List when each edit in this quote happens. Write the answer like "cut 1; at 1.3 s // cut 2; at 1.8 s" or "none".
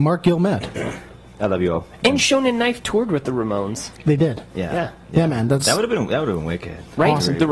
none